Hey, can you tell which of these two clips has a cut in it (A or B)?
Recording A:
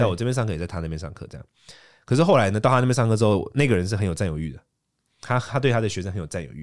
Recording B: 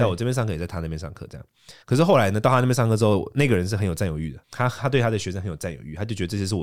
B